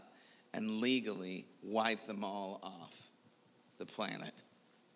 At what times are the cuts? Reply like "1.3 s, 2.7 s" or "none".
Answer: none